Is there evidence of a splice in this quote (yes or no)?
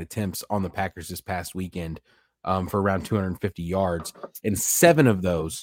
no